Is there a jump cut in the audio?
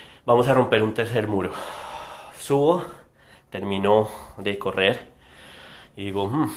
no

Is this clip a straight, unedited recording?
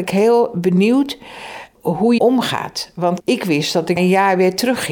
no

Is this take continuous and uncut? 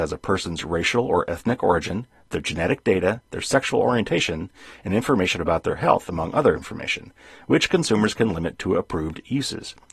yes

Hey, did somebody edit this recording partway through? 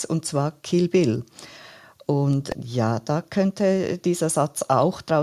yes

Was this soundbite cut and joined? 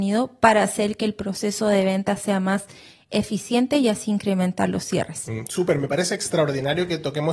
no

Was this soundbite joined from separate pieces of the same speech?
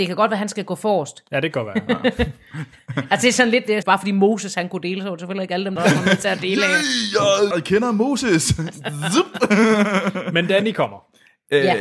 yes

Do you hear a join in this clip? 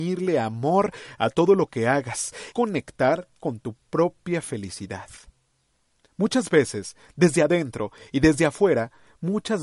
yes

